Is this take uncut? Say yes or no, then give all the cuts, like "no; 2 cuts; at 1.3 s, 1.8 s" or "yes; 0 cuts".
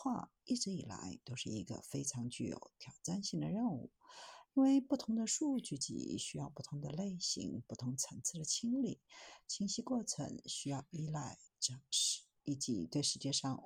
no; 1 cut; at 11.5 s